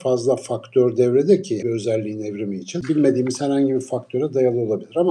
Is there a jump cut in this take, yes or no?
yes